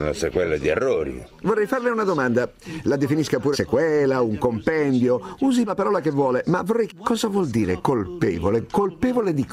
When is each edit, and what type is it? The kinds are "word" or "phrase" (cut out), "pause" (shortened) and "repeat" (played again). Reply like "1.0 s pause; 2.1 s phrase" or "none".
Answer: 3.5 s word; 5.7 s word; 6.9 s word